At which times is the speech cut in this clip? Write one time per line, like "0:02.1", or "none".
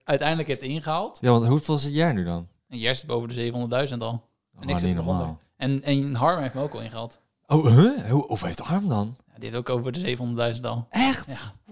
none